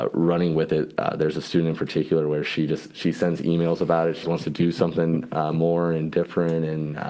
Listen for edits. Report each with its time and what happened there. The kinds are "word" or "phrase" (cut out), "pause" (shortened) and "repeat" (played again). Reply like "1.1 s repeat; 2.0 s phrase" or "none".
4.2 s word